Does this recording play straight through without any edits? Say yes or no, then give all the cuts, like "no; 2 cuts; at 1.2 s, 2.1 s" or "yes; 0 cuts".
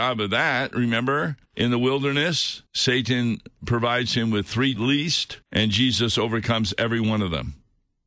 no; 4 cuts; at 1.5 s, 2.7 s, 4.8 s, 5.4 s